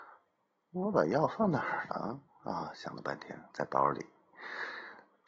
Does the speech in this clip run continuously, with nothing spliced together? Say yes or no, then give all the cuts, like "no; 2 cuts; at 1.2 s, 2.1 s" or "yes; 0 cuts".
no; 1 cut; at 3.5 s